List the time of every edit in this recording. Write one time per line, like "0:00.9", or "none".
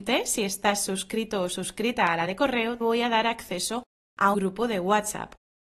0:02.3
0:02.8
0:04.3